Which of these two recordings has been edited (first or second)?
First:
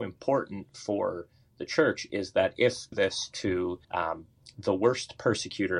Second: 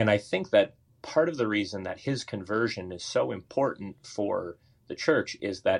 first